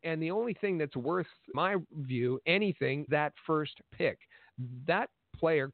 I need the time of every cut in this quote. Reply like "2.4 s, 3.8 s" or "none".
1.5 s, 3.1 s, 3.9 s